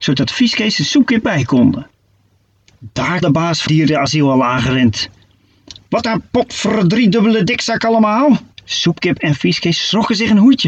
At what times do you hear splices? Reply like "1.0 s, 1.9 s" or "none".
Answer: 1.2 s, 3.2 s, 3.7 s, 6.0 s, 8.5 s

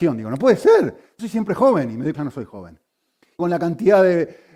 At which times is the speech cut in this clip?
1.2 s, 2.1 s, 3.4 s

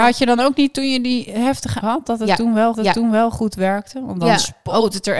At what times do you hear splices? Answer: 1.8 s, 2.7 s

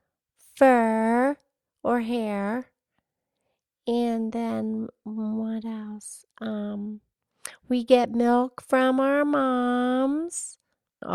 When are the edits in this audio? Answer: none

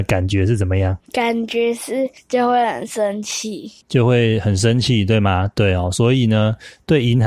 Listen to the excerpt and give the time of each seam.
1.0 s, 3.8 s

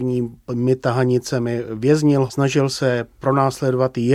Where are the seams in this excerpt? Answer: 2.3 s

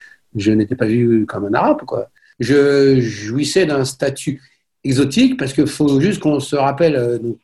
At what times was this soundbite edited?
none

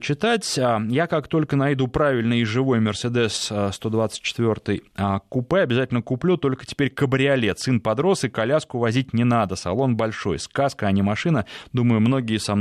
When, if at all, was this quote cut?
none

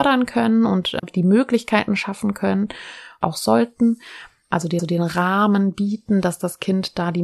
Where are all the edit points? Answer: 1.0 s, 3.2 s, 4.8 s

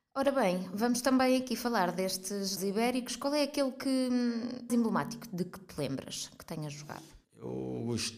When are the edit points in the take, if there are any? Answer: 2.6 s, 4.7 s, 7.2 s

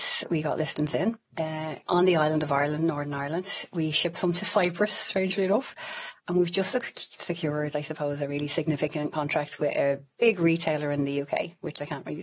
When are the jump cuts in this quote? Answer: 1.3 s

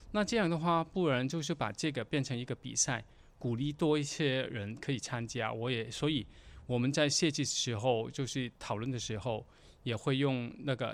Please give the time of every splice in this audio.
none

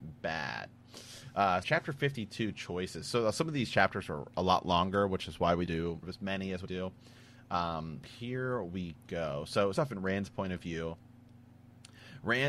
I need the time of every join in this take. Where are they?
1.6 s, 5.7 s, 6.0 s, 6.7 s, 8.0 s, 9.7 s

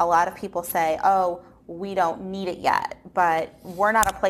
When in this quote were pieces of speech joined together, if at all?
none

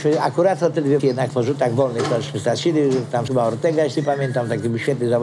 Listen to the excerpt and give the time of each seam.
1.0 s, 3.3 s

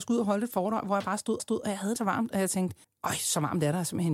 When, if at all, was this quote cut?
1.4 s, 2.0 s, 2.8 s

